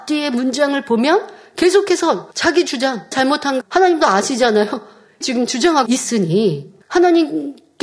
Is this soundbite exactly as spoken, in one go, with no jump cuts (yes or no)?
no